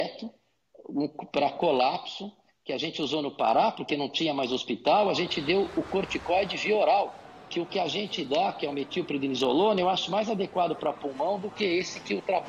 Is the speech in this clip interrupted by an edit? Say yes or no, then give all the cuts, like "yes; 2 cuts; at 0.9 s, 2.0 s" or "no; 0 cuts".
no; 0 cuts